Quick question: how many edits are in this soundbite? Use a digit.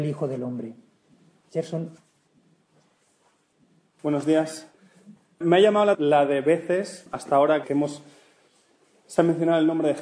2